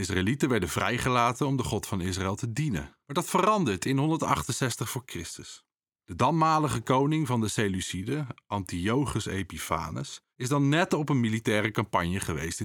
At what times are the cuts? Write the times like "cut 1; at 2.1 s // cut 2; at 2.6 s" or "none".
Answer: cut 1; at 3.0 s // cut 2; at 10.3 s